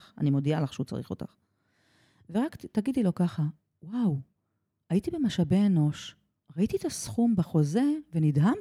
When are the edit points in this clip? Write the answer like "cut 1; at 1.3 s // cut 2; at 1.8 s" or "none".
none